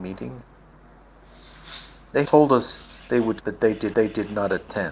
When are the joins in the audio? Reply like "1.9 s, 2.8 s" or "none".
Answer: 2.2 s, 3.4 s, 3.9 s